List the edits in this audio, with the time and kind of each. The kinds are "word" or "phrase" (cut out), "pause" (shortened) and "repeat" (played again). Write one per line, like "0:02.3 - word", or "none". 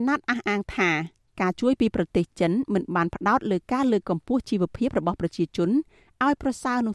none